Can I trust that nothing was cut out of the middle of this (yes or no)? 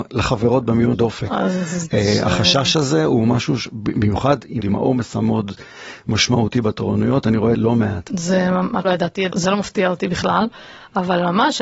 no